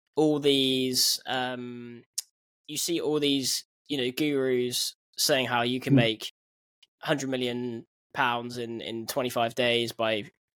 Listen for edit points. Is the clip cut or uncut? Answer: uncut